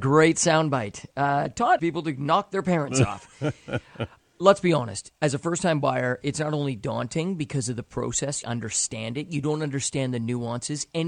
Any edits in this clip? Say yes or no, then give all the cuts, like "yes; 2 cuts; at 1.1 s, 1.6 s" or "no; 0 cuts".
yes; 4 cuts; at 1.8 s, 4.2 s, 5.2 s, 8.4 s